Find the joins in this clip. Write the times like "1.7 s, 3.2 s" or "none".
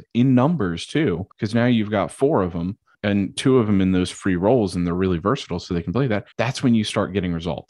1.3 s, 2.9 s, 6.3 s